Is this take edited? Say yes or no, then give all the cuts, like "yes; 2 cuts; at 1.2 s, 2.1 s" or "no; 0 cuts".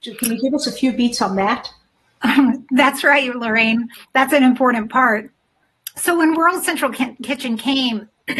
no; 0 cuts